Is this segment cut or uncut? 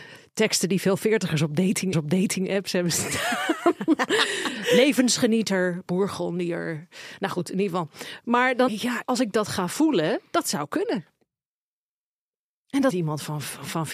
cut